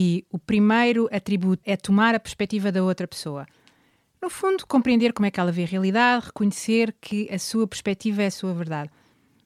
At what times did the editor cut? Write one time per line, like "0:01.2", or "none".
0:01.6